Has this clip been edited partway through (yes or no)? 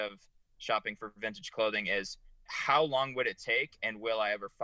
yes